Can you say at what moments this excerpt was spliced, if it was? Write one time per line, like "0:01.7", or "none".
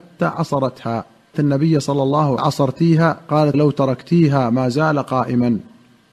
0:01.3
0:02.4
0:03.5